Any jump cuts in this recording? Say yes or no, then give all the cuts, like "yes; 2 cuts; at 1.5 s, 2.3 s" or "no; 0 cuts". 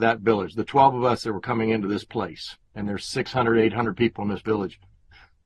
no; 0 cuts